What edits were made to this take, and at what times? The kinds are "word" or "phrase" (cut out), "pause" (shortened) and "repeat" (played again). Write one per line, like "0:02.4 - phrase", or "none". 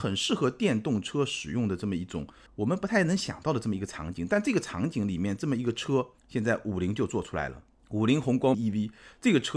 0:02.5 - pause
0:06.2 - pause
0:07.8 - pause
0:08.5 - word